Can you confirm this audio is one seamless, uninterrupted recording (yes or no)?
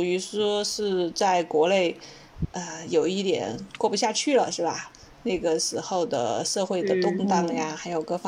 yes